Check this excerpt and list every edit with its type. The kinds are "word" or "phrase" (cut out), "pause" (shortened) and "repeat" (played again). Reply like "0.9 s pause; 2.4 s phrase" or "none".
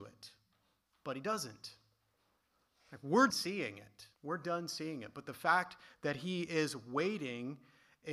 3.3 s word; 4.2 s pause